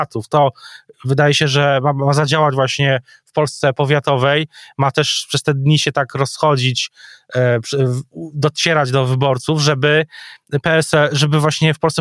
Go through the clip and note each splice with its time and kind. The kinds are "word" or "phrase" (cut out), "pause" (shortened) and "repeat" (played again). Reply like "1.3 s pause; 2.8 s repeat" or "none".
none